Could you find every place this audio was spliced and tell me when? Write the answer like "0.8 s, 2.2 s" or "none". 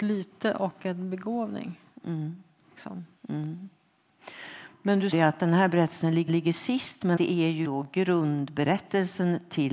5.1 s, 6.3 s, 7.2 s, 7.6 s